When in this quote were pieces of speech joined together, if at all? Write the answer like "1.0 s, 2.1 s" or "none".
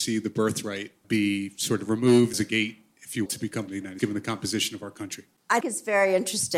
1.0 s, 2.3 s, 3.3 s, 3.7 s, 4.0 s, 5.6 s